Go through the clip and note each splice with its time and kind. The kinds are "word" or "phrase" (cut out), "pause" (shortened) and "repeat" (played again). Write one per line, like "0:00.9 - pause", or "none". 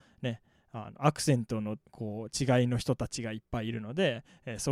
0:01.9 - pause